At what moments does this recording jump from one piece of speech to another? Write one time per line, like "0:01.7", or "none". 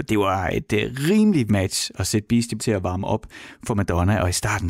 0:01.5
0:02.6